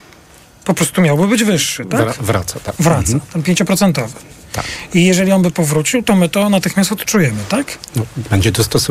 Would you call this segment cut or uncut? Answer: uncut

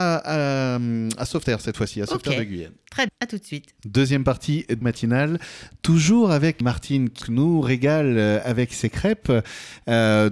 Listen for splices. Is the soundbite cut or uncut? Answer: cut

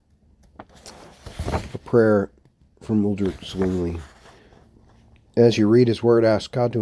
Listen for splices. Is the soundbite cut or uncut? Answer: uncut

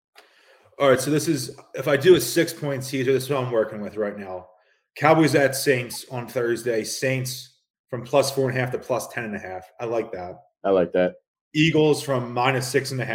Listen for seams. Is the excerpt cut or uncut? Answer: uncut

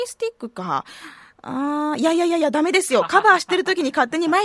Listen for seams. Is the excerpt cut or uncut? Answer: uncut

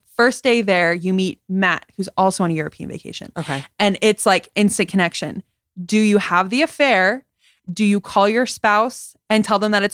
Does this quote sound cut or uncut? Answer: uncut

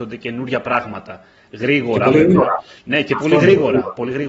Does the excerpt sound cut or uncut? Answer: uncut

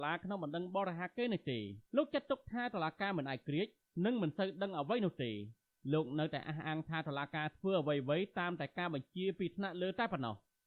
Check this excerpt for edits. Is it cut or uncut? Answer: cut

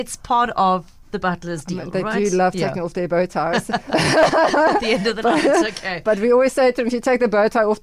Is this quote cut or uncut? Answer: uncut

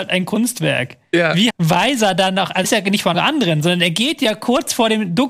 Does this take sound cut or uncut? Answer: cut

